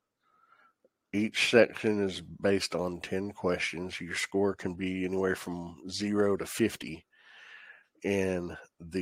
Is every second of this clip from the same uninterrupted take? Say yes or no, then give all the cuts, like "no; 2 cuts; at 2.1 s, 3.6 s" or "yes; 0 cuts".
yes; 0 cuts